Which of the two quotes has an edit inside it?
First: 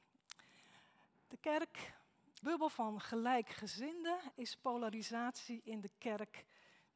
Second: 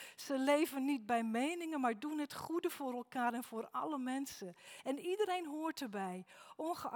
first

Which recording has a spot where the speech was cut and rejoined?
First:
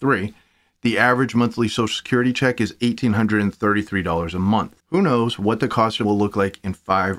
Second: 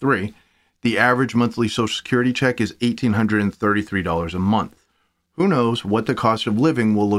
first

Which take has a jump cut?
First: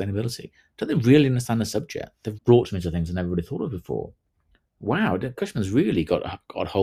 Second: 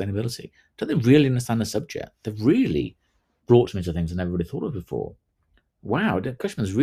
first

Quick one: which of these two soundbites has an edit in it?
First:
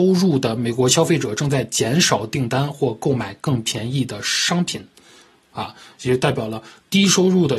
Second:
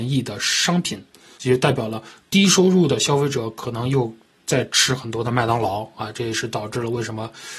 second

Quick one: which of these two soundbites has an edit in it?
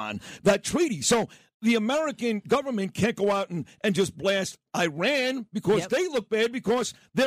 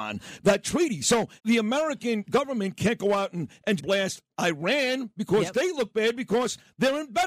second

